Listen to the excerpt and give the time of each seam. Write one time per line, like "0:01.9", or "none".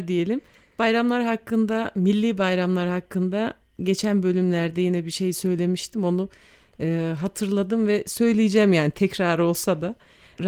none